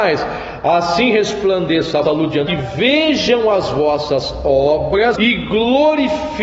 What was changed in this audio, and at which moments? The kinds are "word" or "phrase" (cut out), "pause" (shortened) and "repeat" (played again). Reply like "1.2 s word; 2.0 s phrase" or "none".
2.0 s word; 2.5 s phrase; 5.2 s word